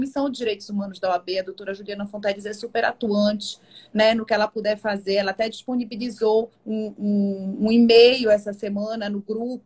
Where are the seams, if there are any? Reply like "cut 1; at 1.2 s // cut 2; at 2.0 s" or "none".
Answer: cut 1; at 6.5 s